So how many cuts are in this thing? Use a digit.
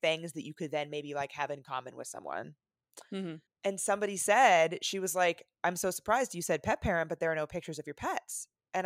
1